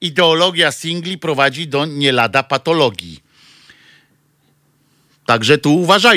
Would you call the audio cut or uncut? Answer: uncut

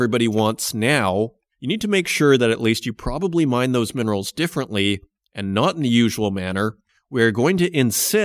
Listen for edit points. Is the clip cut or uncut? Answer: uncut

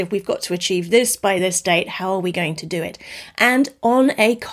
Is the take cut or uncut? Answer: uncut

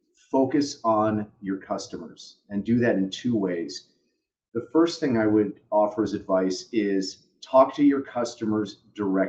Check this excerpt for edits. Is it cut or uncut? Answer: uncut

